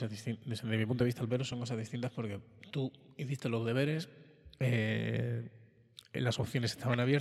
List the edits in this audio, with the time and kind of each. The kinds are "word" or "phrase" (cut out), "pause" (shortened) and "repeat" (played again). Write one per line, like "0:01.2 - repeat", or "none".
none